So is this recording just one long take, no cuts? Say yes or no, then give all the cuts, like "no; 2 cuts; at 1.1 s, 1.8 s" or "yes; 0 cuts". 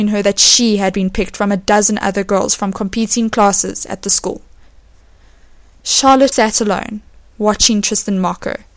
no; 1 cut; at 6.3 s